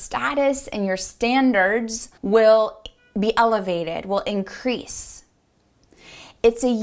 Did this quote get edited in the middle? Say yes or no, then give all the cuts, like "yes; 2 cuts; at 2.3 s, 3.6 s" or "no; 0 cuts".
yes; 1 cut; at 2.2 s